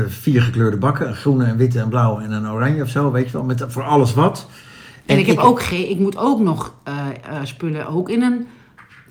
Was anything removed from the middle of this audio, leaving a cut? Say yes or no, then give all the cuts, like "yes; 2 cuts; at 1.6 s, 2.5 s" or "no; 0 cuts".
no; 0 cuts